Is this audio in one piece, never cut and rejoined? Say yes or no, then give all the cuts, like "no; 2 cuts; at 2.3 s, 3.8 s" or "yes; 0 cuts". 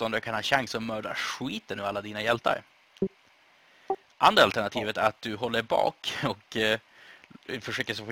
yes; 0 cuts